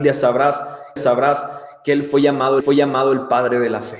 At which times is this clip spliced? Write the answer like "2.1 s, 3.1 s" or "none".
1.0 s, 2.6 s